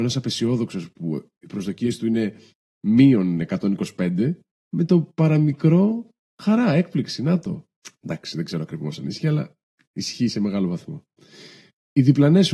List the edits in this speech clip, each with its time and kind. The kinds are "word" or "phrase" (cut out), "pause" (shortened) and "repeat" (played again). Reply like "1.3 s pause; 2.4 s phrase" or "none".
none

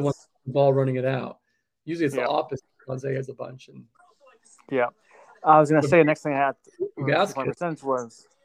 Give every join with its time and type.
none

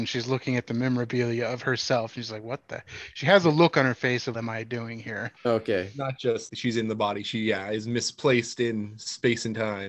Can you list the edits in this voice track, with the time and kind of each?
4.3 s phrase; 5.4 s pause; 6.5 s word

